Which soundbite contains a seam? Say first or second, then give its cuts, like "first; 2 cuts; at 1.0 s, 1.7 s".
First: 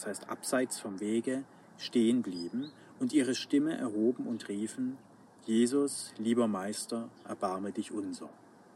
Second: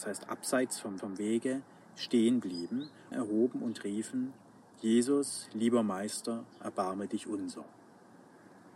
second; 2 cuts; at 1.0 s, 3.1 s